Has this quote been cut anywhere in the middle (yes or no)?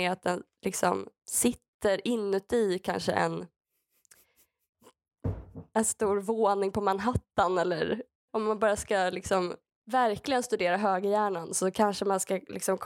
no